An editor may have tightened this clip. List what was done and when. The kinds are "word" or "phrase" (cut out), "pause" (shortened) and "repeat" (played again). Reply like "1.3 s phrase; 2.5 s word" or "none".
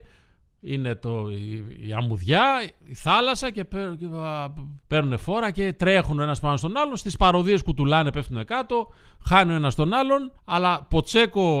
4.8 s pause; 10.4 s pause